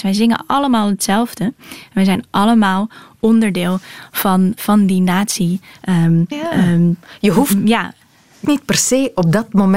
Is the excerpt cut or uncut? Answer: cut